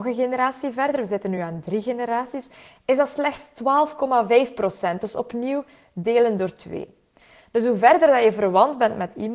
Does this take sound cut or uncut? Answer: uncut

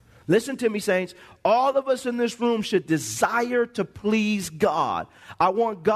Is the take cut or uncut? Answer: uncut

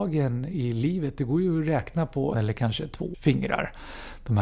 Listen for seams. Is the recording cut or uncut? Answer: cut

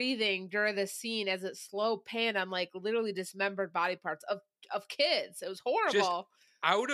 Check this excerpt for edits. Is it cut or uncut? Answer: uncut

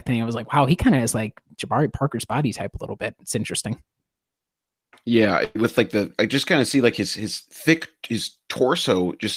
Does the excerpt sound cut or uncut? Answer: uncut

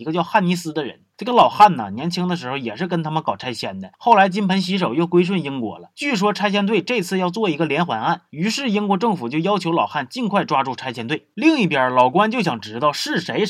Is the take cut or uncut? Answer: uncut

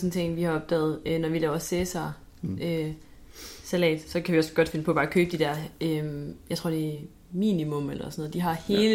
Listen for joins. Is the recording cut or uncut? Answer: uncut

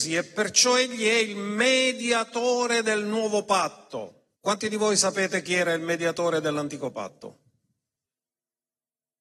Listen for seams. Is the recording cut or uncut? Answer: cut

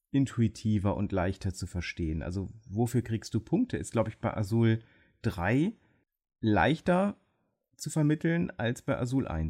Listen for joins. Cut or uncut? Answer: uncut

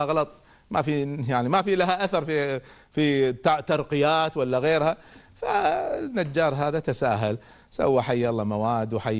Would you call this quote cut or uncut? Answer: uncut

